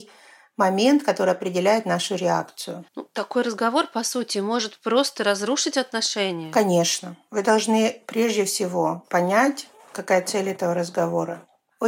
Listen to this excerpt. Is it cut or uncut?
cut